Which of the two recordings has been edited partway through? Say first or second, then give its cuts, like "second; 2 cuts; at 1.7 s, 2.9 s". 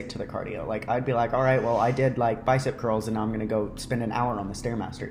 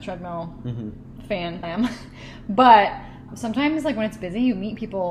second; 2 cuts; at 1.6 s, 3.3 s